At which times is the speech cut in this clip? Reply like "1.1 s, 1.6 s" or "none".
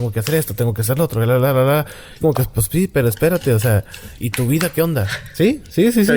2.2 s, 4.2 s

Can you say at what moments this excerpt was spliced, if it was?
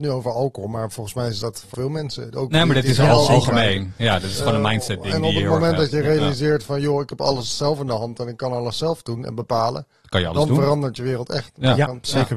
1.7 s

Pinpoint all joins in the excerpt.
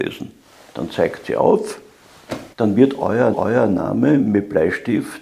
2.5 s, 3.3 s

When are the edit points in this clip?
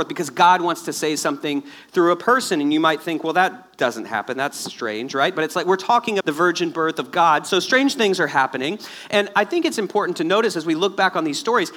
6.2 s

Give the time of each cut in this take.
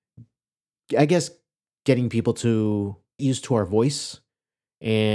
3.2 s

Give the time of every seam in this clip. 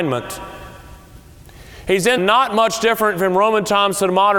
2.2 s

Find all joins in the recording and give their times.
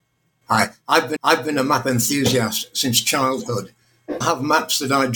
1.2 s, 4.2 s

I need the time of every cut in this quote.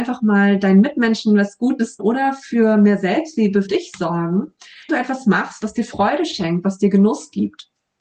2.0 s, 3.7 s, 4.9 s

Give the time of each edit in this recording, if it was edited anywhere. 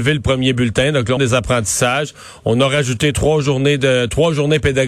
1.2 s

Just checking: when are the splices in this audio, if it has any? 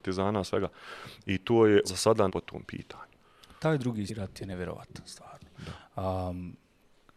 1.8 s, 2.3 s, 4.1 s

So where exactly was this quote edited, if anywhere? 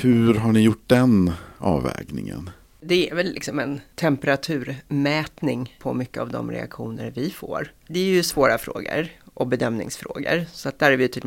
none

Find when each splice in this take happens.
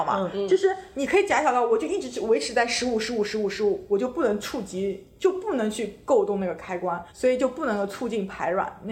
7.1 s

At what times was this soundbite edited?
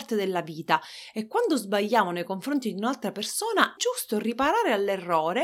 3.8 s

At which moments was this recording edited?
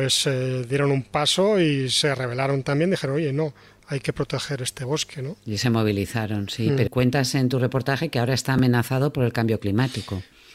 6.9 s

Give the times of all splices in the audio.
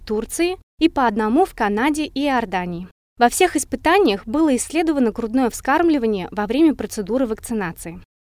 none

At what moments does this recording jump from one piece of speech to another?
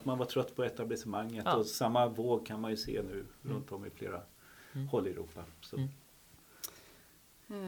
none

